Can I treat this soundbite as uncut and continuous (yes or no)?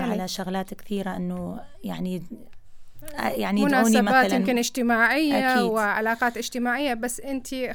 yes